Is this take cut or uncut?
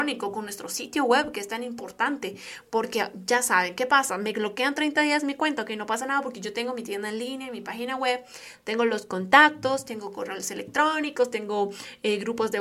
uncut